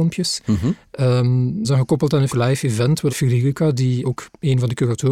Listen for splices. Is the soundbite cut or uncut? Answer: cut